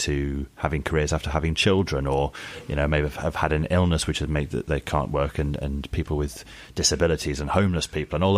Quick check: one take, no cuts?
yes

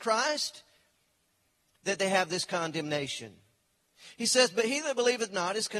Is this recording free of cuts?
yes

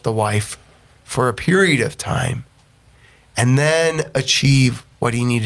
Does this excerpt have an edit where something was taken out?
no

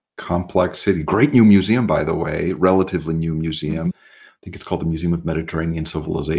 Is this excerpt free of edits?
yes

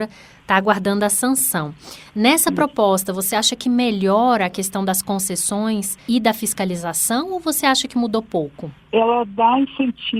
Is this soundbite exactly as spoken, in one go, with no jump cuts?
yes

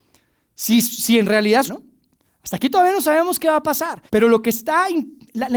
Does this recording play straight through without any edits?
no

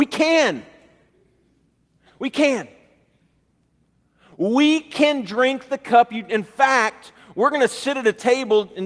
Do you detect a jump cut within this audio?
no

